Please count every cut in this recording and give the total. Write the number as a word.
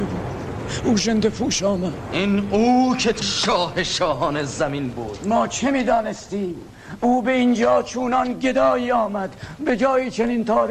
one